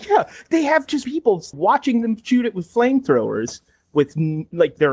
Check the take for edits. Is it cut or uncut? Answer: cut